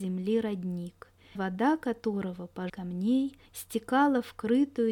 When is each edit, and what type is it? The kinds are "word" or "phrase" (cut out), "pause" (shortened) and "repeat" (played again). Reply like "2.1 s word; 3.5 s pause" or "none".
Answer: 1.4 s word; 2.7 s phrase; 3.5 s pause